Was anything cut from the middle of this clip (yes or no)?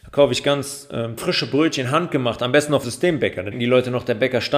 yes